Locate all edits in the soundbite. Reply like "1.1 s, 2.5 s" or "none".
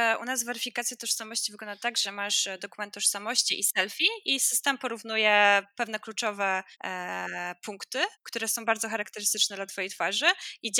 6.7 s, 8.1 s